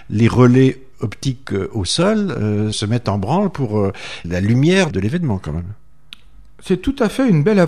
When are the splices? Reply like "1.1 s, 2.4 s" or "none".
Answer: 2.7 s, 4.2 s, 4.9 s